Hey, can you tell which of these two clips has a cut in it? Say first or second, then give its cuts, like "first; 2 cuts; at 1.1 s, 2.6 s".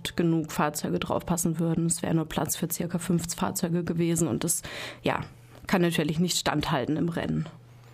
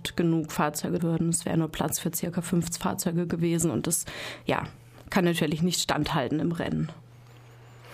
second; 1 cut; at 1.0 s